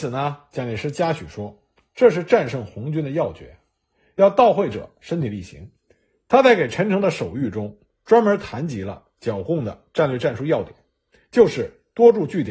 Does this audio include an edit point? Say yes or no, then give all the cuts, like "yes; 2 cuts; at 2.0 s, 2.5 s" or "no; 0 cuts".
yes; 1 cut; at 5.8 s